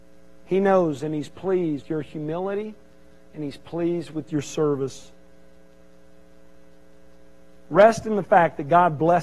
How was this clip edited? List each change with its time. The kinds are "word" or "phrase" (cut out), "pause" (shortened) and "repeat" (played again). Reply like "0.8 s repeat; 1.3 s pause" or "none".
1.8 s word